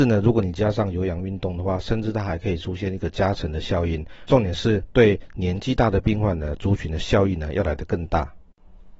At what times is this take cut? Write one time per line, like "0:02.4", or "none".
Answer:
0:04.3